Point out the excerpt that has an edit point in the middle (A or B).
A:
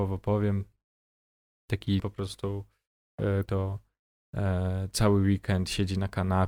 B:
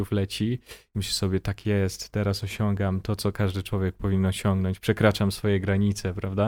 A